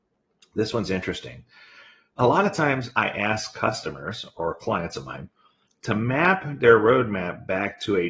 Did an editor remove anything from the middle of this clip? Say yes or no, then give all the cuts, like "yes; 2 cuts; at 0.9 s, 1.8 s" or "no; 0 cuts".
no; 0 cuts